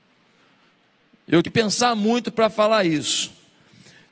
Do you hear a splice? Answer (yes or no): yes